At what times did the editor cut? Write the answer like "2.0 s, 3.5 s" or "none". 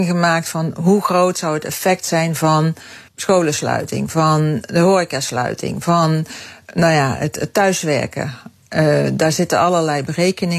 3.1 s